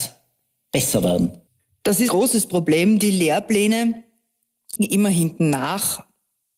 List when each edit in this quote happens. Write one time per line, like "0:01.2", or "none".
0:01.5
0:02.1
0:04.8

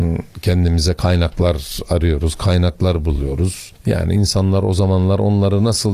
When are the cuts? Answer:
0:03.8

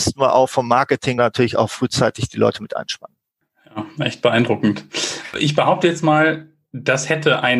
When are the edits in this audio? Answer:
0:01.2

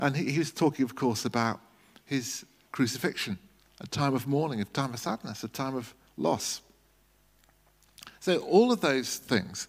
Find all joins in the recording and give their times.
0:06.1

